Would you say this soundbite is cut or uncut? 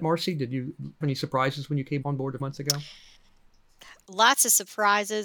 cut